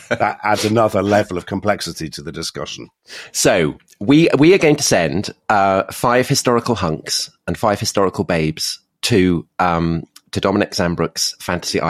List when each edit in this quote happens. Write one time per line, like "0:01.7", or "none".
none